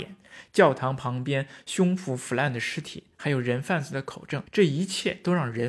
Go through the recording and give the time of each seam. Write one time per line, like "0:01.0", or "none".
0:04.5